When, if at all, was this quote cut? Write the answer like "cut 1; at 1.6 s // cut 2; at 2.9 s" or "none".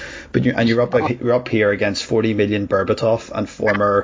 none

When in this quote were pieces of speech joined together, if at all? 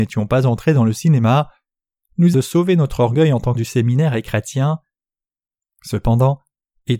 cut 1; at 2.3 s // cut 2; at 3.5 s

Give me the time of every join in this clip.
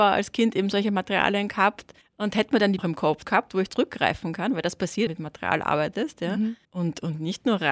cut 1; at 2.0 s // cut 2; at 2.8 s // cut 3; at 3.2 s // cut 4; at 3.7 s // cut 5; at 5.1 s // cut 6; at 6.6 s

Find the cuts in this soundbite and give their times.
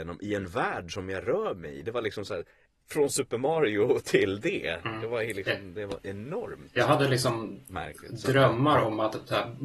none

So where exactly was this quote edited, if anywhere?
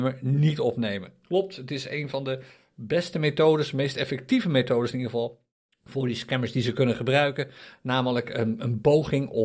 cut 1; at 5.6 s

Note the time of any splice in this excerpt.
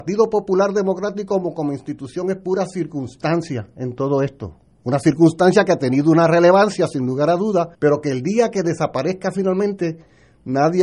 cut 1; at 7.7 s

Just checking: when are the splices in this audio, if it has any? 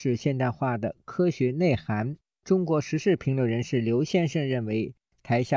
none

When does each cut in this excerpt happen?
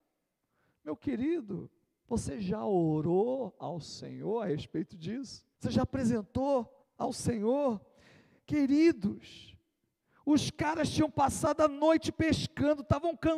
cut 1; at 5.5 s // cut 2; at 6.8 s

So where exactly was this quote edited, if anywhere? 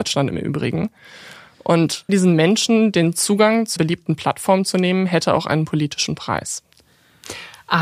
cut 1; at 2.1 s // cut 2; at 3.8 s

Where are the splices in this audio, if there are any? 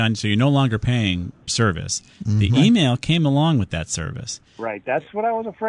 cut 1; at 1.5 s

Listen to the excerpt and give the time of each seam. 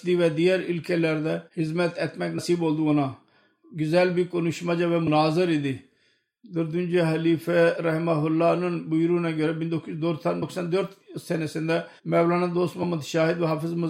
cut 1; at 1.5 s // cut 2; at 12.0 s

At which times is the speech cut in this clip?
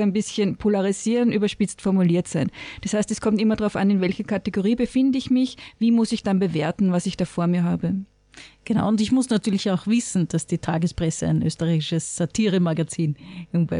none

